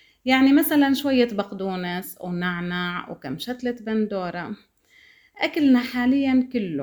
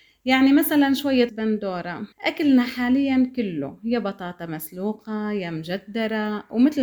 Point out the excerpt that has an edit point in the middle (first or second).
second